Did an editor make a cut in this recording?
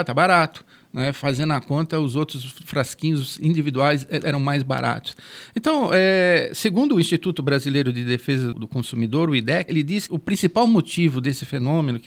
yes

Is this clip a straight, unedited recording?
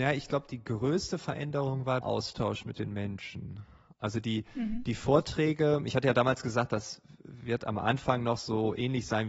no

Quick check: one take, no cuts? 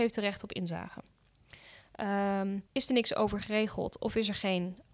no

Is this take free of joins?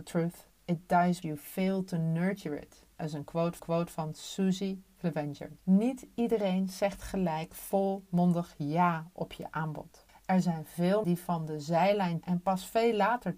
no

